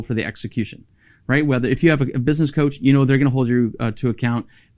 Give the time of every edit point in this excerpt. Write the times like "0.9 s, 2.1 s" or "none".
none